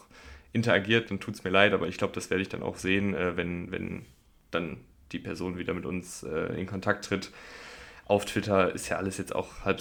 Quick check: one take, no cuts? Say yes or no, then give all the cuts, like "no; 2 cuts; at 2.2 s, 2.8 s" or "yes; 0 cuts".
yes; 0 cuts